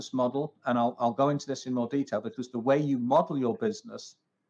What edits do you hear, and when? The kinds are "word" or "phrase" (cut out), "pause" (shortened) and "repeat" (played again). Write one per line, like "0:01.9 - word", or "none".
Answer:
none

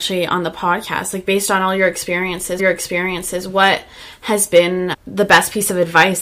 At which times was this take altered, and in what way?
0:02.6 - repeat
0:04.9 - word

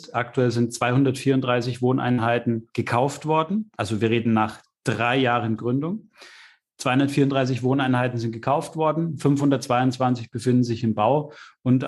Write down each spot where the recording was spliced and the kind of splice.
none

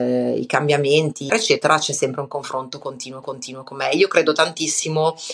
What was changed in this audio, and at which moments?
0:01.3 - word
0:03.2 - repeat

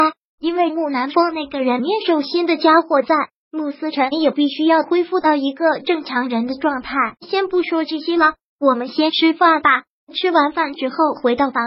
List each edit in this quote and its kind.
0:07.2 - pause

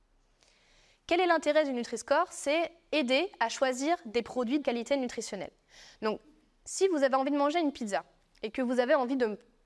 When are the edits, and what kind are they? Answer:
0:04.6 - word

